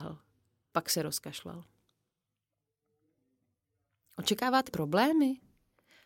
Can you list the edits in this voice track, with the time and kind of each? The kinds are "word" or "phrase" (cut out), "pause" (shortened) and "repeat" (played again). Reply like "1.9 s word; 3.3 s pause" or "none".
4.7 s word